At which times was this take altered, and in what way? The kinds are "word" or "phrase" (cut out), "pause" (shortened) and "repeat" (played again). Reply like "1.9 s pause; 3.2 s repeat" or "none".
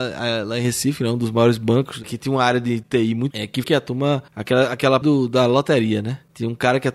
3.3 s word; 3.6 s word; 5.0 s word